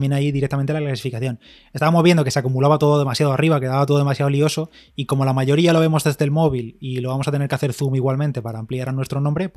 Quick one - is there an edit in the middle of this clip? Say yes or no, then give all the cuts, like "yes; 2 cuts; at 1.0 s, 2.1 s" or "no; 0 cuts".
no; 0 cuts